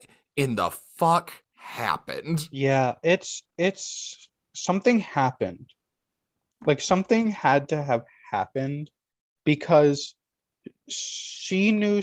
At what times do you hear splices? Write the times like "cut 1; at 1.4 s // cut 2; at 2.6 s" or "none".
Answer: cut 1; at 1.4 s // cut 2; at 3.5 s